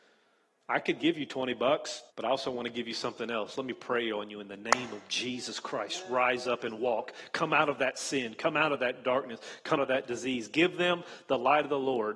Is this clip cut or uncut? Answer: cut